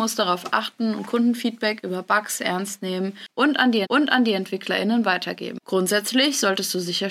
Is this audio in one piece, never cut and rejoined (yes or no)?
no